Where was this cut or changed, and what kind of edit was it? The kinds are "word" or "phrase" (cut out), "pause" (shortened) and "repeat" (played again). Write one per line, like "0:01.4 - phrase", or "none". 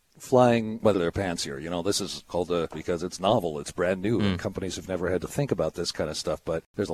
0:00.9 - phrase
0:02.7 - phrase

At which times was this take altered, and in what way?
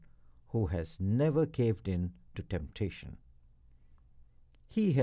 none

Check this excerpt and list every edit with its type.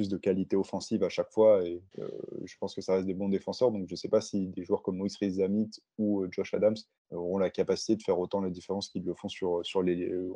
0:01.9 - pause
0:07.0 - pause

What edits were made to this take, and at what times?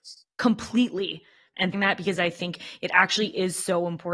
0:01.7 - phrase

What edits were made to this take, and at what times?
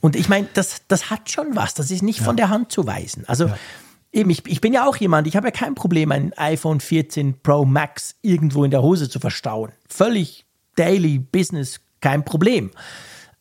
none

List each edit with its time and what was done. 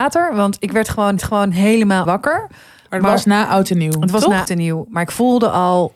0:01.2 - repeat
0:02.1 - word
0:04.5 - word

